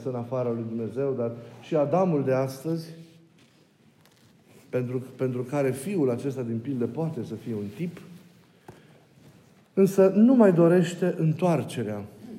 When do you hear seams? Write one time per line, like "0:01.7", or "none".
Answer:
none

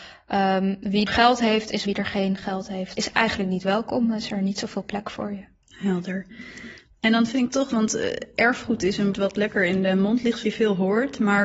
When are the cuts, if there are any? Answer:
0:01.1
0:01.8
0:02.9
0:09.1
0:10.4

